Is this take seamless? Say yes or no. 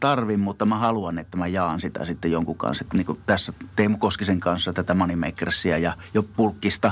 yes